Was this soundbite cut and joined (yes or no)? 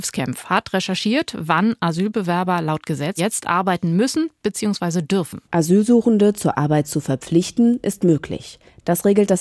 yes